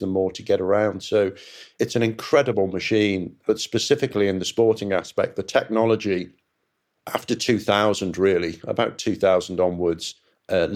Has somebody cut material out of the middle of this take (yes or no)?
no